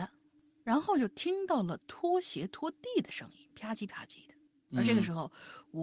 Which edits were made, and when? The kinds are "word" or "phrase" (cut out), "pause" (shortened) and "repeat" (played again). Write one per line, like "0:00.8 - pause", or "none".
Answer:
0:04.5 - pause